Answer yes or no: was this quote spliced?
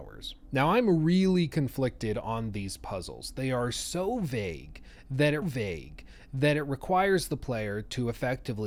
yes